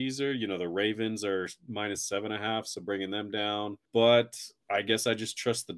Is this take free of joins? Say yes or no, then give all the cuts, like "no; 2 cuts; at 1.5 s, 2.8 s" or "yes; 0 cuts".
no; 1 cut; at 3.9 s